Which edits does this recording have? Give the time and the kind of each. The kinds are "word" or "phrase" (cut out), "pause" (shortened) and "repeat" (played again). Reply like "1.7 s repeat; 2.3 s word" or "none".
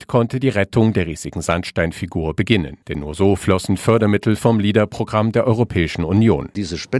2.8 s pause